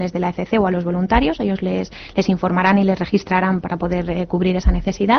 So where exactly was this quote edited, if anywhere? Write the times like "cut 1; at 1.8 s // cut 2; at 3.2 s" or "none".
cut 1; at 3.6 s